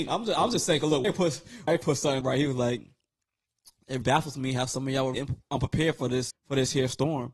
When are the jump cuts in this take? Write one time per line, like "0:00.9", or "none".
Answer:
0:01.0
0:01.7
0:02.2
0:04.0
0:05.1
0:06.3